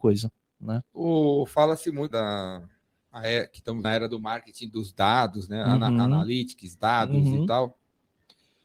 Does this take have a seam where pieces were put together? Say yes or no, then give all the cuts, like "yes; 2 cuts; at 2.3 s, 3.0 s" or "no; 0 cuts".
yes; 2 cuts; at 2.1 s, 3.8 s